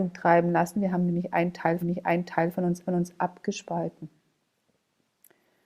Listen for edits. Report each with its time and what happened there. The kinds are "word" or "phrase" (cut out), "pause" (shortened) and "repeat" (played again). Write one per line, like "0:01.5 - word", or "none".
0:01.8 - repeat
0:02.9 - repeat